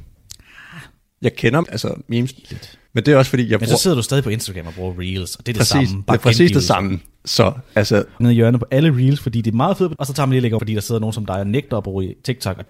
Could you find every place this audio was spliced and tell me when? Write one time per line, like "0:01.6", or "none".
0:01.6
0:02.9
0:08.2
0:10.0
0:10.6